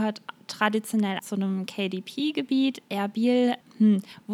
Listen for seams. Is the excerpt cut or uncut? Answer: cut